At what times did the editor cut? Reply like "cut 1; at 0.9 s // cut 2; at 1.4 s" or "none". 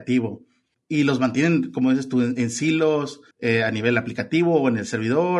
cut 1; at 3.3 s